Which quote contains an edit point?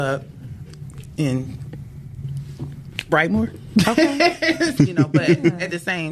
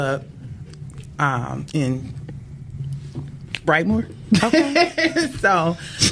first; 2 cuts; at 1.2 s, 4.8 s

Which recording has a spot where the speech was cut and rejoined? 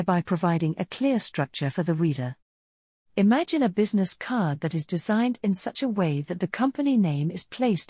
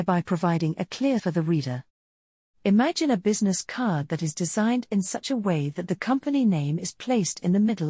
second; 1 cut; at 1.2 s

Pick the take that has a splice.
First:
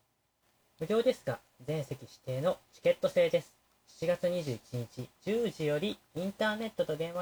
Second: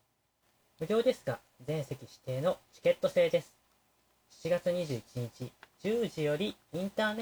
first; 2 cuts; at 3.8 s, 5.2 s

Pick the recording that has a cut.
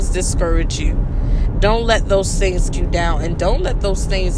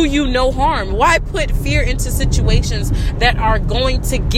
first; 2 cuts; at 2.7 s, 3.4 s

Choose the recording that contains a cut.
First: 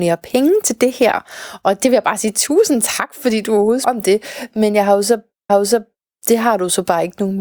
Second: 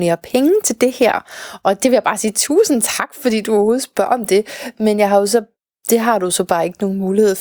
first; 2 cuts; at 3.8 s, 5.5 s

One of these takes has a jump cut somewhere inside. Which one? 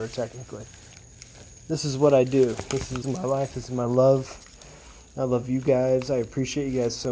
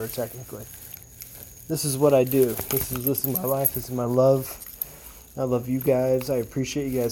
first; 1 cut; at 3.0 s

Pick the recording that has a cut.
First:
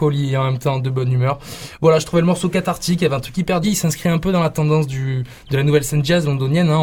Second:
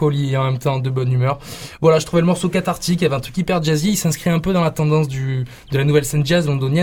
first; 1 cut; at 3.6 s

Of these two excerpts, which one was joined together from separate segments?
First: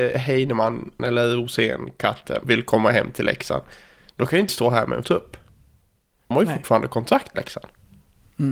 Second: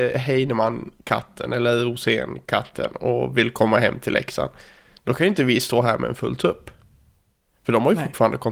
first; 6 cuts; at 1.0 s, 2.4 s, 4.5 s, 5.0 s, 6.3 s, 7.3 s

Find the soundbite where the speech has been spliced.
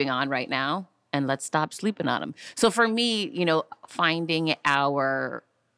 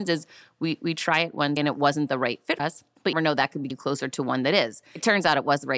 second; 4 cuts; at 1.6 s, 2.6 s, 3.1 s, 3.7 s

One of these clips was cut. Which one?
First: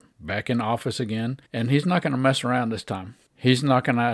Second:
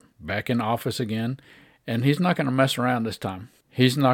first; 1 cut; at 1.5 s

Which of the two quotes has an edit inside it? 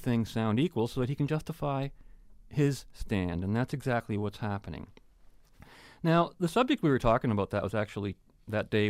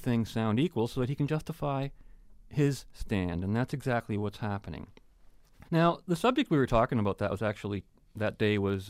second; 1 cut; at 5.7 s

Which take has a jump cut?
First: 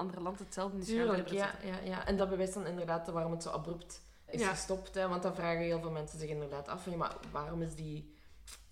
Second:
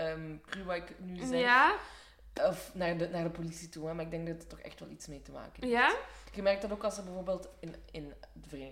first; 2 cuts; at 2.2 s, 4.3 s

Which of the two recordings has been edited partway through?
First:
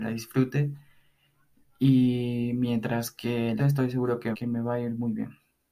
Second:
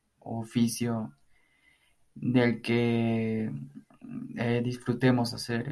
first; 2 cuts; at 3.6 s, 4.3 s

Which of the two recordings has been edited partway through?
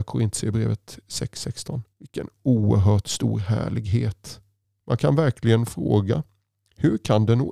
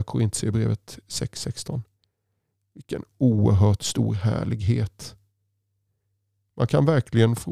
first; 2 cuts; at 1.9 s, 4.6 s

